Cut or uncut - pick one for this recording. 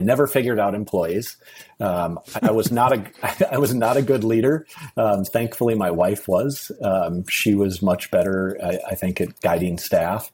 cut